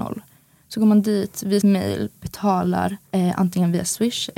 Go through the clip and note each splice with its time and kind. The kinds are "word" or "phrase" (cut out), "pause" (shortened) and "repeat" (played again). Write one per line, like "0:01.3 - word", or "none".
0:01.6 - word
0:03.1 - pause